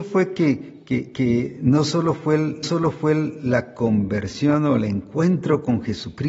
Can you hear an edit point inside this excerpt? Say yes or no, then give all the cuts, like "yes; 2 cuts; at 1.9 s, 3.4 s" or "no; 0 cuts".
yes; 1 cut; at 2.6 s